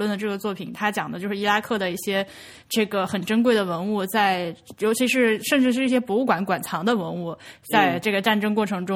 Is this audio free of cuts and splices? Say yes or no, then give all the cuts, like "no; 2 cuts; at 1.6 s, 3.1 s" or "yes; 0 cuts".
yes; 0 cuts